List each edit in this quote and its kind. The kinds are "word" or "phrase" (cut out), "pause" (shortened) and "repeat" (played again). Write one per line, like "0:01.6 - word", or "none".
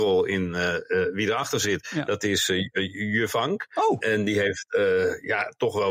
none